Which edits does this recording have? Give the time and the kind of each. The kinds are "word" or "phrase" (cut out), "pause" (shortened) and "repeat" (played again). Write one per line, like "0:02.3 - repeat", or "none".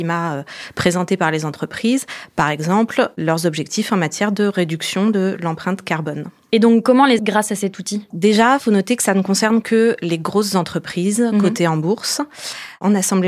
0:07.2 - phrase
0:08.1 - word